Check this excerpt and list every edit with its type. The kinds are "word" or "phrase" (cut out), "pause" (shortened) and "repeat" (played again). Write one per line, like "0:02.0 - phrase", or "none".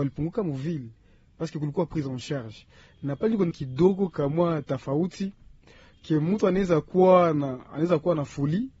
0:03.5 - word